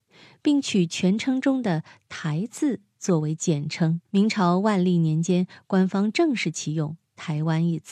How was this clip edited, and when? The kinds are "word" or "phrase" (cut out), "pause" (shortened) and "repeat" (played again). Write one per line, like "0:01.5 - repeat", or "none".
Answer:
0:04.0 - pause